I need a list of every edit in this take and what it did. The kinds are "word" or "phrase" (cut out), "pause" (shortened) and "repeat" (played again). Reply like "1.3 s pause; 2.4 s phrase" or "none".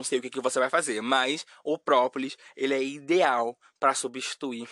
none